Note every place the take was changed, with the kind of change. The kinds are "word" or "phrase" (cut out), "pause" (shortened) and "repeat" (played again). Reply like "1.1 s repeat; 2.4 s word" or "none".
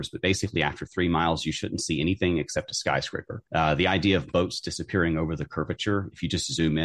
3.5 s pause